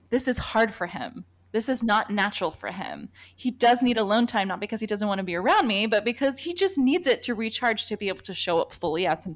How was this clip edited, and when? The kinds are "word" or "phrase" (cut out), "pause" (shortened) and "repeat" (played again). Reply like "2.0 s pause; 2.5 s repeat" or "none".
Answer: none

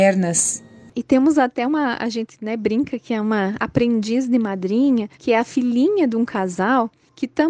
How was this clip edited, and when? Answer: 5.1 s pause

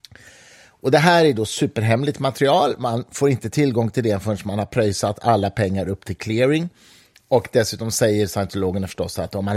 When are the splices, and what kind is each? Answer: none

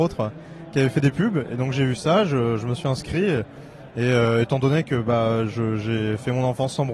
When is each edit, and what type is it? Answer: none

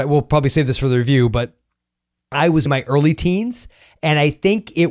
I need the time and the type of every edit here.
2.7 s word

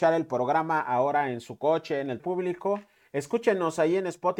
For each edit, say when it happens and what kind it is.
2.2 s word

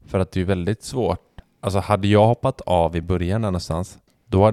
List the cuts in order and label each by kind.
none

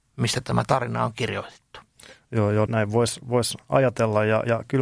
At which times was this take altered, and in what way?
2.7 s word

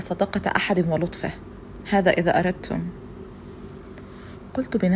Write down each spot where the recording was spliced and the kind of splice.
none

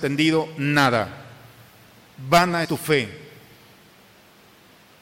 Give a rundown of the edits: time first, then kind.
2.6 s word

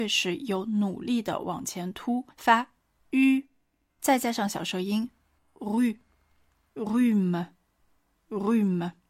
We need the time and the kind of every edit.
2.3 s pause; 3.9 s word

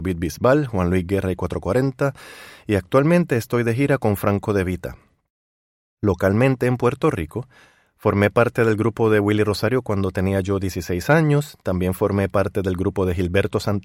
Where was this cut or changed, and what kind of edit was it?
none

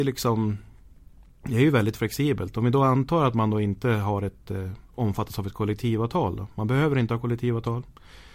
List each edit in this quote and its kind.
4.9 s pause

